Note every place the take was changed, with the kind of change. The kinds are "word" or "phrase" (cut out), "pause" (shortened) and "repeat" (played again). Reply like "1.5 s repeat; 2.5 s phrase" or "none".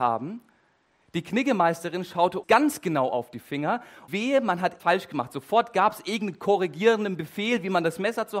2.4 s word; 4.1 s word; 4.8 s word